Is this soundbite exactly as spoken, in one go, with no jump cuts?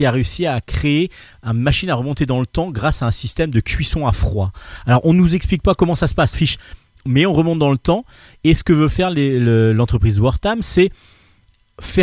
no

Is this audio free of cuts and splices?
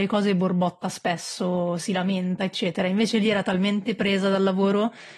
yes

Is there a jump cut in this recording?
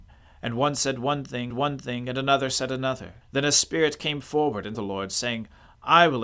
yes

